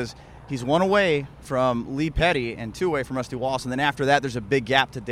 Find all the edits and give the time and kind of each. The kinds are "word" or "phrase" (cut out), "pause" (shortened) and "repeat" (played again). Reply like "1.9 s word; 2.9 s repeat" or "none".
none